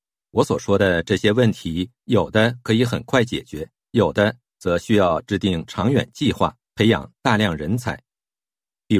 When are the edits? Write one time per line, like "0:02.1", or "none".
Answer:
0:02.0
0:03.8
0:06.7